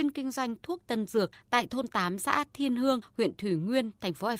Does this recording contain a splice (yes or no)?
no